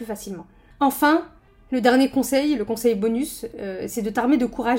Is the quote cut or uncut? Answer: uncut